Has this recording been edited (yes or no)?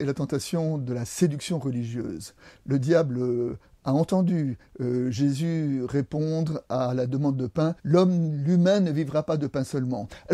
yes